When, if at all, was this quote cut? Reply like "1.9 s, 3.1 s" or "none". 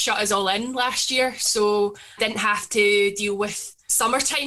2.2 s

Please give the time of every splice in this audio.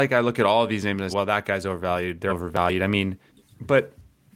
1.1 s, 2.3 s, 3.3 s

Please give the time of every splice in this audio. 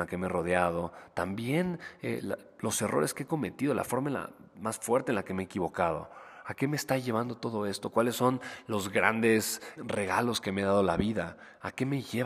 9.8 s

